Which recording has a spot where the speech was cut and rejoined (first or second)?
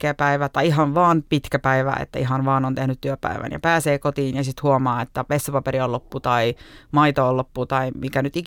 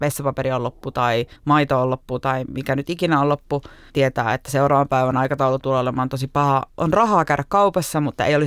second